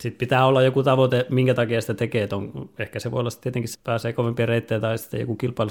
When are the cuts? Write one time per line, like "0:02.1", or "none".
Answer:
0:03.7